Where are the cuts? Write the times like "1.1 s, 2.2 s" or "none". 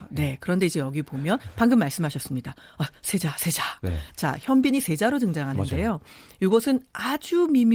none